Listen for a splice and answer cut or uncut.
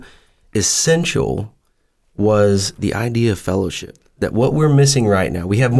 uncut